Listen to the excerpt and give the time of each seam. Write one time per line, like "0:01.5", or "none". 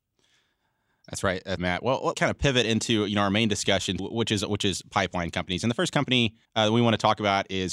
0:01.6
0:02.1
0:04.0
0:06.4